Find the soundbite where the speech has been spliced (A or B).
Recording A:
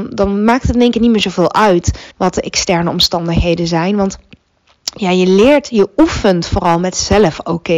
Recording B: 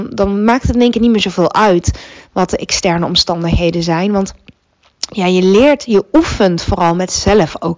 A